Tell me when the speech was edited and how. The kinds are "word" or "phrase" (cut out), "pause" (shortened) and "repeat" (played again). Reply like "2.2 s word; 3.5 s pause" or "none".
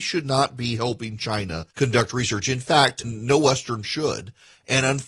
1.7 s pause; 3.0 s word; 3.8 s word